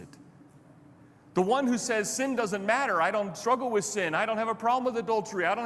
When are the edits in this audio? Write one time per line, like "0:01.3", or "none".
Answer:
none